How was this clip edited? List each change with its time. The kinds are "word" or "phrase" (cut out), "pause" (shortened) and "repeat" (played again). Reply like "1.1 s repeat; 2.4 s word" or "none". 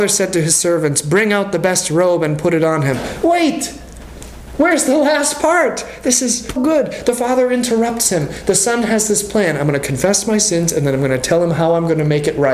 6.6 s word